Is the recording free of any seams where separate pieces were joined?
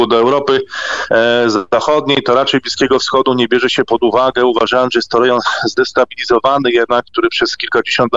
yes; 0 cuts

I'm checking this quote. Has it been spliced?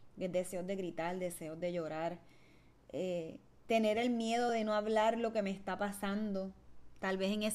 no; 0 cuts

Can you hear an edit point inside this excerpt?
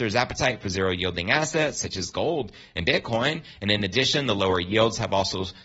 no; 0 cuts

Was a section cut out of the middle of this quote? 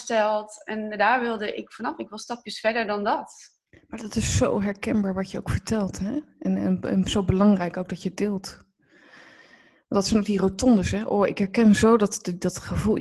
no; 0 cuts

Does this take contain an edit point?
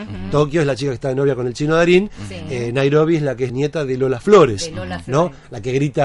yes; 1 cut; at 3.5 s

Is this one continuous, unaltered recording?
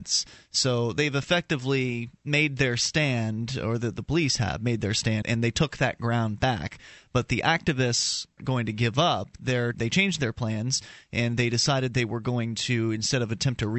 no; 3 cuts; at 5.2 s, 8.4 s, 9.7 s

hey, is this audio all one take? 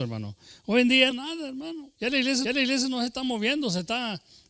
no; 3 cuts; at 1.1 s, 1.9 s, 2.4 s

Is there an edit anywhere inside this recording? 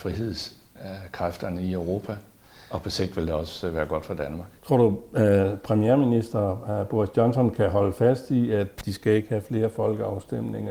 yes; 1 cut; at 4.6 s

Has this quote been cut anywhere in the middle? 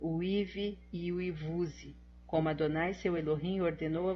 no; 0 cuts

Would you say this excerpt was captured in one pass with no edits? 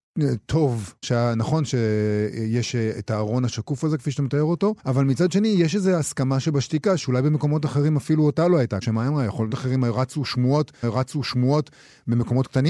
no; 5 cuts; at 1.0 s, 4.8 s, 8.8 s, 9.5 s, 10.8 s

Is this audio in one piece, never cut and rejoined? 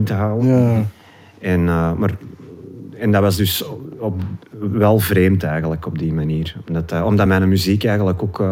yes; 0 cuts

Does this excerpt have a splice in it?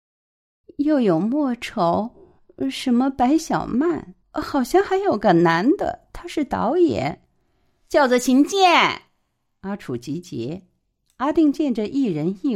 yes; 1 cut; at 4.2 s

